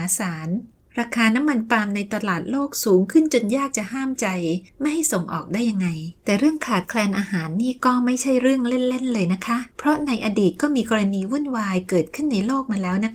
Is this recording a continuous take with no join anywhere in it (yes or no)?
no